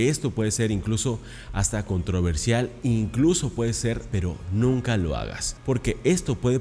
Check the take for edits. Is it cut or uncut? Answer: cut